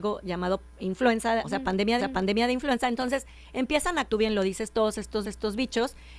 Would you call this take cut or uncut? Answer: cut